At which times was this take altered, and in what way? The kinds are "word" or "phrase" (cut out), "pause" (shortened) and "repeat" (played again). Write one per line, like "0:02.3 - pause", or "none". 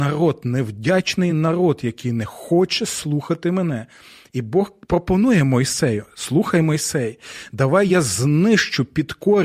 none